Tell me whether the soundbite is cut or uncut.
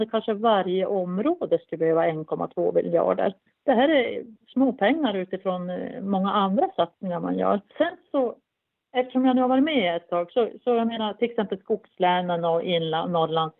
uncut